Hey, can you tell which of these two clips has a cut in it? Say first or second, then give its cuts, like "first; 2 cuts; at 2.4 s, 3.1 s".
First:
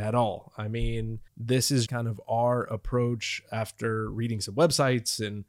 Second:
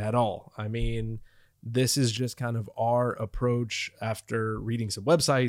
first; 2 cuts; at 1.3 s, 1.9 s